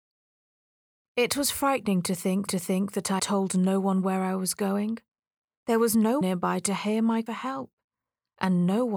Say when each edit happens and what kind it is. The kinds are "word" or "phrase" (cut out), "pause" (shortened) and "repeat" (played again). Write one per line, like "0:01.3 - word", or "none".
0:02.5 - repeat
0:03.2 - word
0:06.2 - word
0:07.3 - phrase